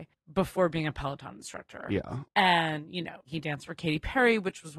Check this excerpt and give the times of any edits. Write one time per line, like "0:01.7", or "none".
0:02.3